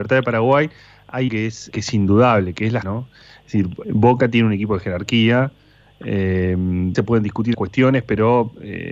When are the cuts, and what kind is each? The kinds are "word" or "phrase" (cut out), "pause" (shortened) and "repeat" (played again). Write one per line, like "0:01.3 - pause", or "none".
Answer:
0:01.3 - word
0:01.7 - word
0:02.8 - word
0:03.8 - word
0:06.9 - word
0:07.5 - word